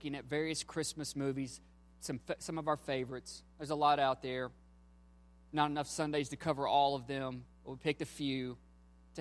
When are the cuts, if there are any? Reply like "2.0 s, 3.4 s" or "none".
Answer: 7.5 s